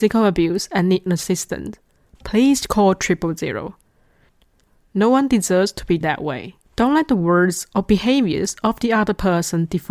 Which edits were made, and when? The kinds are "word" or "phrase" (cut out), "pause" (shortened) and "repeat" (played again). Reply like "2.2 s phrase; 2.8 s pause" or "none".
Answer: 1.1 s word; 2.1 s word; 6.0 s word; 6.7 s pause